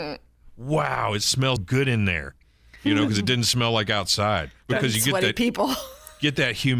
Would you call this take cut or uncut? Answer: cut